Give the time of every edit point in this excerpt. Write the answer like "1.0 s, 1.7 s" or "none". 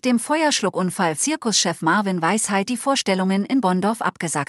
1.2 s, 2.7 s